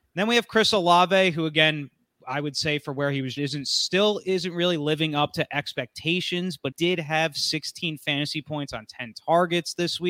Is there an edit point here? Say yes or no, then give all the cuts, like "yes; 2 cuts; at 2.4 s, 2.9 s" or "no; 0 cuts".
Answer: yes; 3 cuts; at 2.2 s, 3.4 s, 6.7 s